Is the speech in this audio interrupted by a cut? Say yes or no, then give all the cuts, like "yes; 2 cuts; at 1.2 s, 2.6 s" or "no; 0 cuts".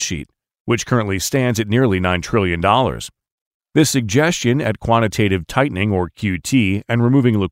no; 0 cuts